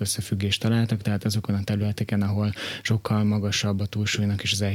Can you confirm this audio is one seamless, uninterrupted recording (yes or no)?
yes